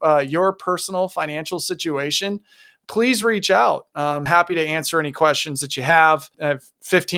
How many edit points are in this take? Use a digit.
0